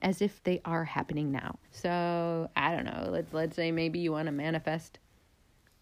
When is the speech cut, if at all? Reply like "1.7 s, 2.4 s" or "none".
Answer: 1.6 s